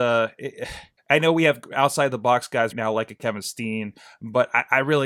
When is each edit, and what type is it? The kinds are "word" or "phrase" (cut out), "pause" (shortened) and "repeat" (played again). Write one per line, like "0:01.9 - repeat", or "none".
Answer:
0:01.0 - pause
0:02.7 - word